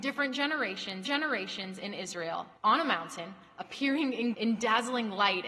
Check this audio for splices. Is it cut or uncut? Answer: cut